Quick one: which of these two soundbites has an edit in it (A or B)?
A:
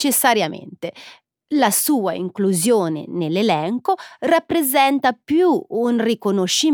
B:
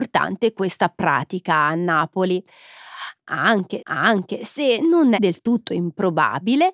B